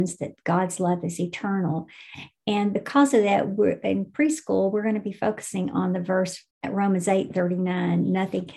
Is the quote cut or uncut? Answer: cut